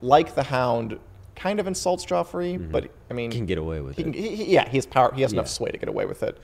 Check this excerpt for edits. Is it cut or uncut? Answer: uncut